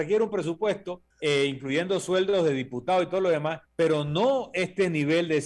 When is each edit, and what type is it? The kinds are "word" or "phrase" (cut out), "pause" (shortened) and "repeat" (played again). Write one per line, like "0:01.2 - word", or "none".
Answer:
0:01.1 - pause
0:03.7 - pause